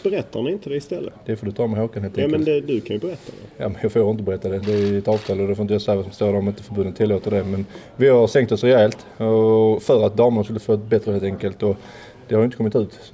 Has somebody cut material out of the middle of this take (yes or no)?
yes